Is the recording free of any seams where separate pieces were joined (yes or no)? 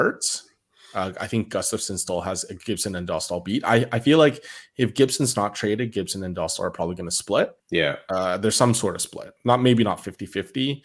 no